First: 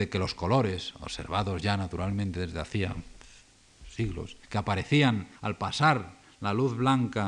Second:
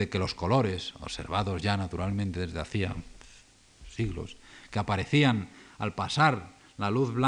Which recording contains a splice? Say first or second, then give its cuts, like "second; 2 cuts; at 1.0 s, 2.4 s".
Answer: first; 2 cuts; at 4.4 s, 5.4 s